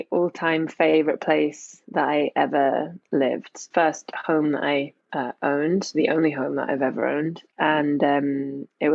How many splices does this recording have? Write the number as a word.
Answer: one